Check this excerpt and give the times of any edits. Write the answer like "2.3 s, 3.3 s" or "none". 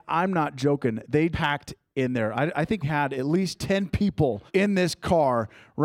1.3 s, 2.8 s, 4.5 s